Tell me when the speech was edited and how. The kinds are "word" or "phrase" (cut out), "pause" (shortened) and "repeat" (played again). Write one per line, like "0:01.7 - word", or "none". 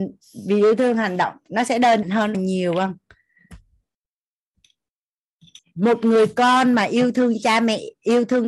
0:02.0 - word
0:02.3 - word
0:05.6 - word

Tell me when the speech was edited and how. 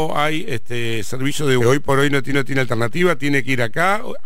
0:01.6 - word
0:02.3 - repeat

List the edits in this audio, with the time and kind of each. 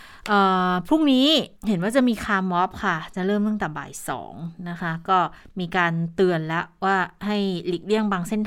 0:01.6 - pause
0:05.4 - pause

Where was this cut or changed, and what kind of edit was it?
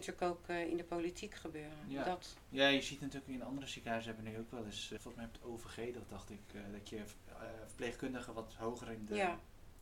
0:05.0 - word

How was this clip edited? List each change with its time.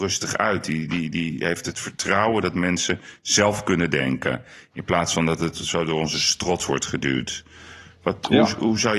none

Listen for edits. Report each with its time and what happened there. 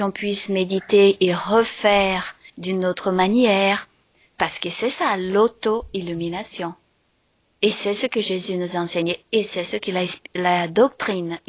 0:02.5 - pause

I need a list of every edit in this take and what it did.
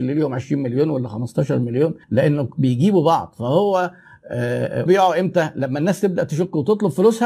0:02.0 - pause
0:04.9 - word

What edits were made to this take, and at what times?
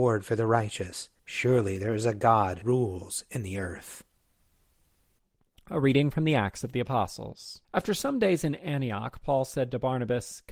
0:01.2 - pause
0:02.6 - word
0:07.6 - pause

